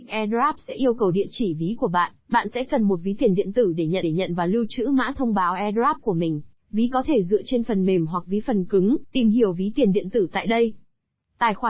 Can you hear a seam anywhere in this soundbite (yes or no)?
yes